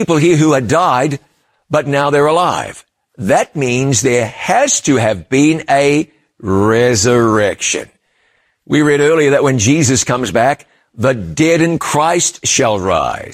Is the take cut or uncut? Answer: uncut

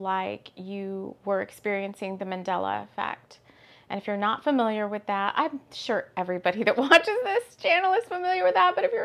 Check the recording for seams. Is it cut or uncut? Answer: uncut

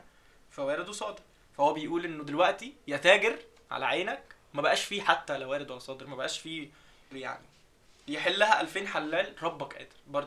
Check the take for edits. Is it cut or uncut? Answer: cut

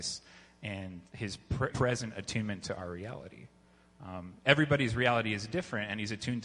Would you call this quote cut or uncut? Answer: cut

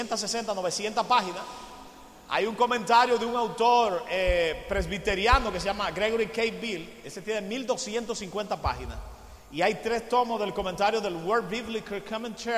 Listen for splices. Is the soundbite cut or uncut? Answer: uncut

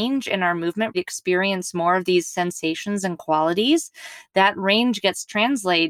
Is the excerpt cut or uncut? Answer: cut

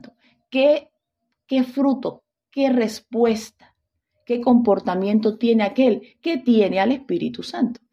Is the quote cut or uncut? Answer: uncut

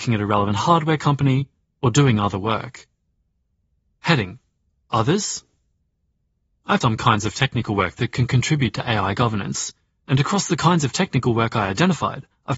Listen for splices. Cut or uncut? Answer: cut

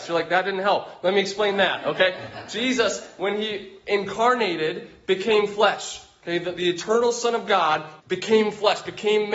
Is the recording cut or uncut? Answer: cut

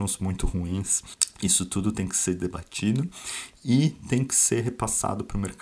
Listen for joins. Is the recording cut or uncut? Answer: uncut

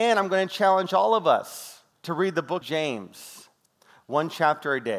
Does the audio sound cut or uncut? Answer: cut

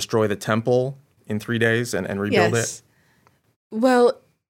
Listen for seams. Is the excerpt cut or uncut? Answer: uncut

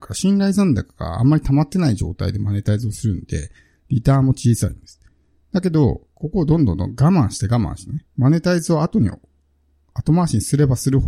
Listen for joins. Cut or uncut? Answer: uncut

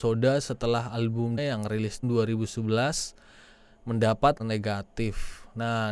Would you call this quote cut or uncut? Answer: cut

